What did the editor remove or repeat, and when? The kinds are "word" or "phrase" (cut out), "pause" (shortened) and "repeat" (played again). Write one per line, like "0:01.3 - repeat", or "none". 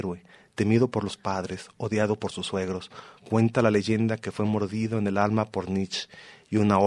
0:03.2 - pause